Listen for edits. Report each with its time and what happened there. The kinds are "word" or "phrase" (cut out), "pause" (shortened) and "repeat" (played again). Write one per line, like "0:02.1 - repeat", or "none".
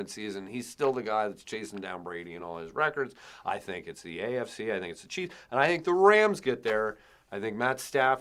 none